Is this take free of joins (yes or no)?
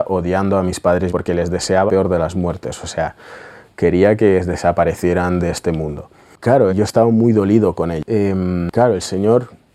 no